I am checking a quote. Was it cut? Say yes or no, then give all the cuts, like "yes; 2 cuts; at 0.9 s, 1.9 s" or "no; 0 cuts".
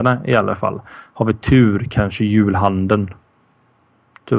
no; 0 cuts